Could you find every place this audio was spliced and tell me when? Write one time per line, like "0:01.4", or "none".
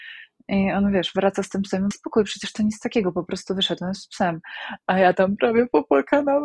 0:01.9